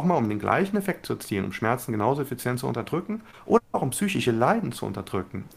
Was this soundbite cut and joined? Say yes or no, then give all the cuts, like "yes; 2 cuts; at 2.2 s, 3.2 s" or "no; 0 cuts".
no; 0 cuts